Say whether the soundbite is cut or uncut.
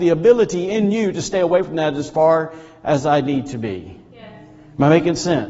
uncut